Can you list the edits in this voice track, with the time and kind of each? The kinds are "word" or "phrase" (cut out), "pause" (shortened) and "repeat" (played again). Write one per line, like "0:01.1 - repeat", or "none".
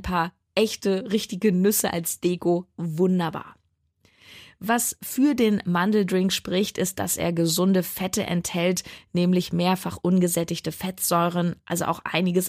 none